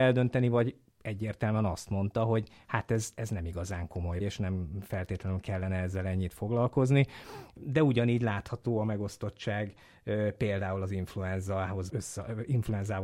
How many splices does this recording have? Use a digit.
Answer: 2